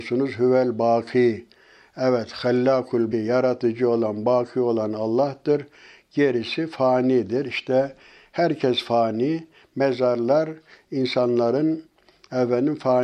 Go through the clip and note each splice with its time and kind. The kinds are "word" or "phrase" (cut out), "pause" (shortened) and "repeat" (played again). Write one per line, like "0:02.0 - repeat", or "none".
0:03.1 - word